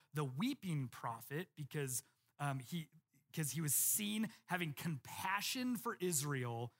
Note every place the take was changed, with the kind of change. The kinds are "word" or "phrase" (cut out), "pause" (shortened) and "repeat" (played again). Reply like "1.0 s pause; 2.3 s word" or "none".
none